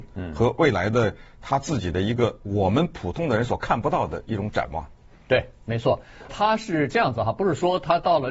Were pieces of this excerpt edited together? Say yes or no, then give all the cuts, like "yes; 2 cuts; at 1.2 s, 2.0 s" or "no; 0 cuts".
yes; 1 cut; at 6.3 s